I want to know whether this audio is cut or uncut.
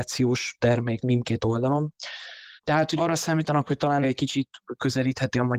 cut